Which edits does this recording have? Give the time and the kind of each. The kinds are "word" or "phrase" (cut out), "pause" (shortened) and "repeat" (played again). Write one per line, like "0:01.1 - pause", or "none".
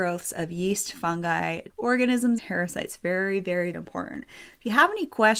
0:01.7 - word
0:02.4 - word
0:03.7 - word